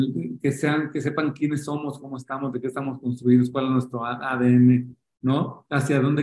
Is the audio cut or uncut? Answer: uncut